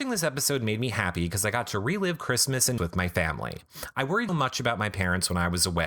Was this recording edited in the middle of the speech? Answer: yes; 2 cuts; at 2.8 s, 4.3 s

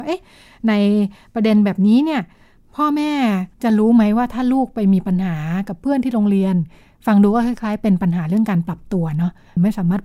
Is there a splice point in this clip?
yes; 1 cut; at 3.5 s

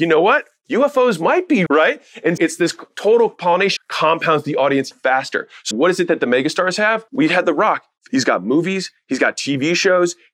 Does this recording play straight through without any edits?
no; 6 cuts; at 1.7 s, 2.4 s, 3.8 s, 4.9 s, 5.7 s, 7.1 s

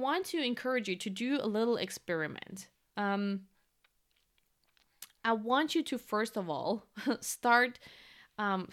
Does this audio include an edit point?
no; 0 cuts

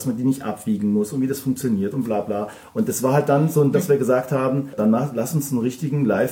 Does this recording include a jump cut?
yes; 2 cuts; at 3.7 s, 4.8 s

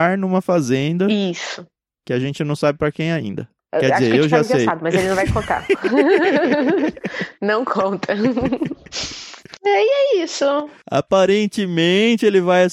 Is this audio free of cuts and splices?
yes; 0 cuts

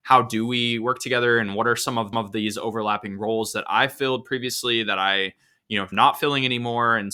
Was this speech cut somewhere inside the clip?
yes; 2 cuts; at 2.1 s, 5.9 s

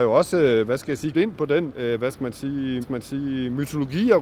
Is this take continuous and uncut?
no; 3 cuts; at 1.1 s, 1.7 s, 2.8 s

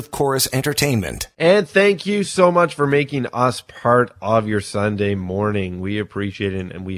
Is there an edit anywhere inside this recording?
no; 0 cuts

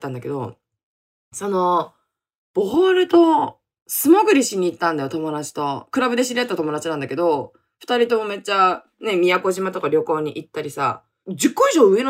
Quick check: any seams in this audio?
no; 0 cuts

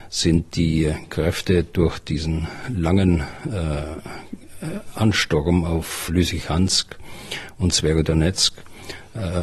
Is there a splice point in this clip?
yes; 1 cut; at 6.1 s

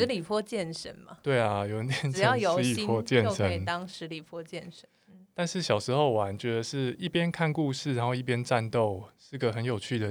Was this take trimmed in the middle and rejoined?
no; 0 cuts

